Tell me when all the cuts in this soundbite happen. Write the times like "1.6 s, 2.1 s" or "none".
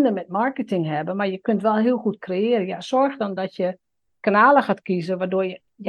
none